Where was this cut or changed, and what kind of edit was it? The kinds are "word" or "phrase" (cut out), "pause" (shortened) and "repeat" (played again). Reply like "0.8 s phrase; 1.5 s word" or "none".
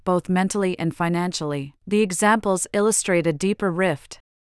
1.8 s pause